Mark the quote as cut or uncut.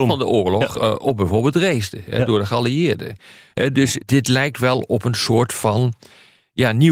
cut